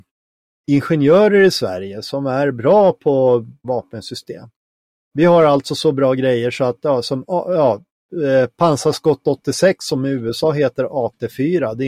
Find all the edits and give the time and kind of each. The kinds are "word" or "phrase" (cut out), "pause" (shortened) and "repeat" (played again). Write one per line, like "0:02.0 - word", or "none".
0:03.6 - word

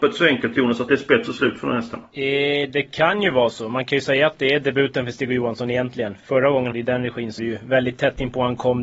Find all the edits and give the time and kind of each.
0:06.7 - phrase
0:07.4 - word

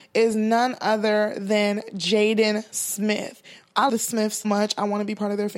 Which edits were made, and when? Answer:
0:03.9 - word
0:04.4 - word

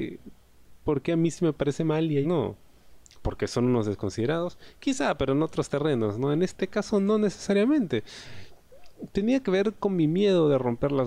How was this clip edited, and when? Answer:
0:02.2 - word

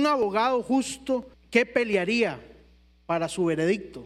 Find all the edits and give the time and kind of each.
0:01.3 - pause

